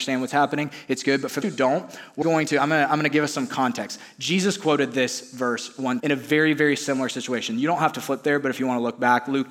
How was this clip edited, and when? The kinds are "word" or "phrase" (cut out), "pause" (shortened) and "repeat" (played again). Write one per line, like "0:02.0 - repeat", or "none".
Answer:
0:01.4 - word
0:02.2 - word
0:06.0 - word